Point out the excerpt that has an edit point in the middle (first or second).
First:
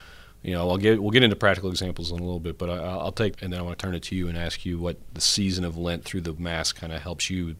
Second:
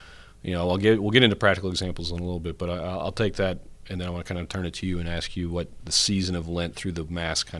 first